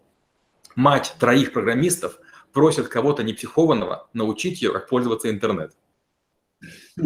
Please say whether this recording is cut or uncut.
uncut